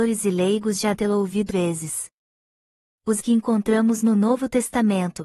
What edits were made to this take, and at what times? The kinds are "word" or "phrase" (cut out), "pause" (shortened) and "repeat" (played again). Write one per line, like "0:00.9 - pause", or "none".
0:00.9 - word
0:01.5 - word
0:03.2 - word